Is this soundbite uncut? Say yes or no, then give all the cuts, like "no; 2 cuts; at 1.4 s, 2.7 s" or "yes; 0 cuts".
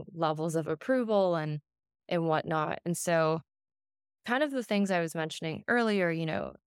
yes; 0 cuts